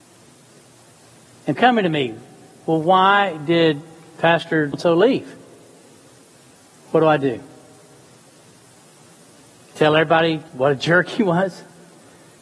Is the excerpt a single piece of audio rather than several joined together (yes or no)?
no